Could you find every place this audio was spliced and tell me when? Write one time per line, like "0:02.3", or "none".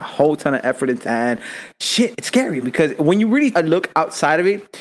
0:01.0
0:02.2
0:02.6
0:03.5